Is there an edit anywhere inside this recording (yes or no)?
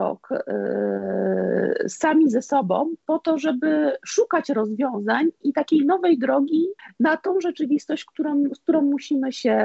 yes